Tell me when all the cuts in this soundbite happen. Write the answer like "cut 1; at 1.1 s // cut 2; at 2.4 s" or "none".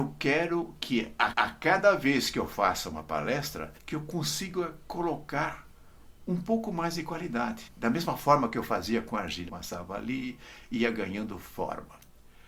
cut 1; at 1.3 s // cut 2; at 3.8 s // cut 3; at 7.7 s // cut 4; at 9.5 s